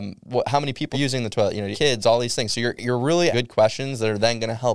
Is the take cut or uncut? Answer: cut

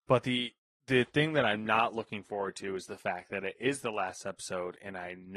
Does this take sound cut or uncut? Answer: uncut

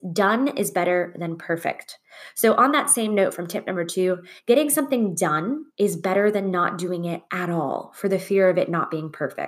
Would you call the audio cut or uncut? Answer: cut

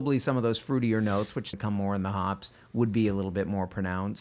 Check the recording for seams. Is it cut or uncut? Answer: cut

